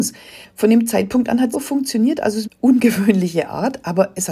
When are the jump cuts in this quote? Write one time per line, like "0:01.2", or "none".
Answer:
0:01.5
0:02.4